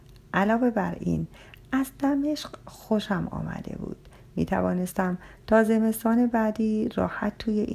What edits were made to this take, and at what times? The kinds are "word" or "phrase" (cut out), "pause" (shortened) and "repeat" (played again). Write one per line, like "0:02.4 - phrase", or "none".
none